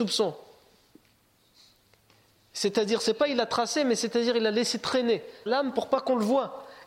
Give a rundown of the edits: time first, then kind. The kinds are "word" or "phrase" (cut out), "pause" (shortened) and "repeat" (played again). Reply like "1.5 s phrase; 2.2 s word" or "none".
5.5 s word